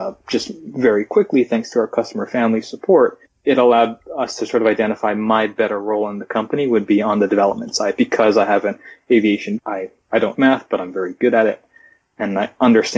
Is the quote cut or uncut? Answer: cut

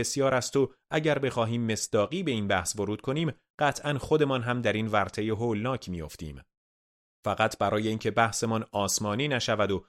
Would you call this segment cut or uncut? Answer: uncut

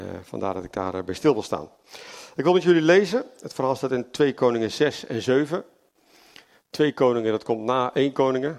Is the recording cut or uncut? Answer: uncut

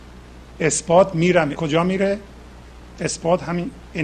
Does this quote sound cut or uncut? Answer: cut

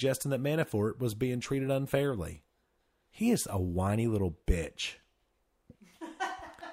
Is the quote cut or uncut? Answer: uncut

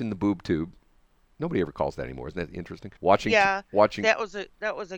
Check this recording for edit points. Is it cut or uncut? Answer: cut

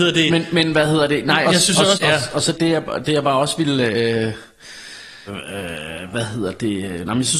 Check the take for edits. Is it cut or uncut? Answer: cut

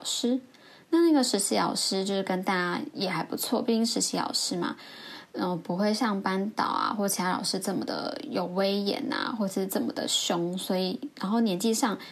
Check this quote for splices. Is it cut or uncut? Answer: cut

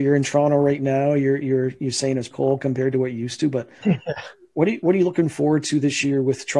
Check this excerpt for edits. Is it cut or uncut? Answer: cut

